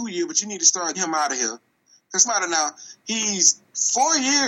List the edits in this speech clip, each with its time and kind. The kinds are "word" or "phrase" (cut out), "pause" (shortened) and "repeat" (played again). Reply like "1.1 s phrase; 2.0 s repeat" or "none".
0.9 s word; 2.2 s word